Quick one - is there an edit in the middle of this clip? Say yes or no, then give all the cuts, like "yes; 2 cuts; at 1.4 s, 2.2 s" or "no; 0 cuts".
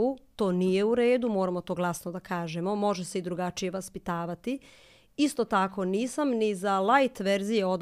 no; 0 cuts